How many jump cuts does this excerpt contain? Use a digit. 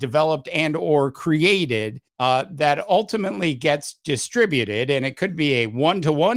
1